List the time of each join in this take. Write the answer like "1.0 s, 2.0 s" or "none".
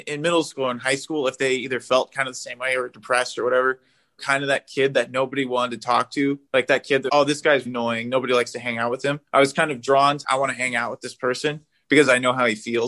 4.2 s, 6.5 s, 7.1 s, 7.7 s, 9.2 s, 10.2 s